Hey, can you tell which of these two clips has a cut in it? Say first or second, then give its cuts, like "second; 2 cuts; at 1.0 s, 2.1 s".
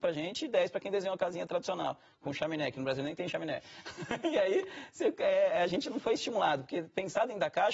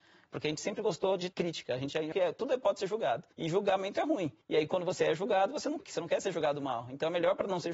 second; 5 cuts; at 1.3 s, 2.1 s, 3.3 s, 4.4 s, 5.8 s